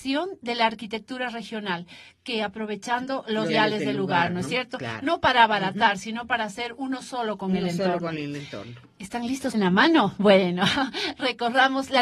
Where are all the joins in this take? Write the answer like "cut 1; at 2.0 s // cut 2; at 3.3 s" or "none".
cut 1; at 3.5 s // cut 2; at 9.5 s